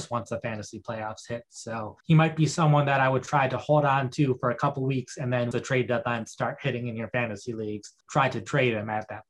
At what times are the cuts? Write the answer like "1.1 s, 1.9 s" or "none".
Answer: 2.0 s, 5.5 s, 8.0 s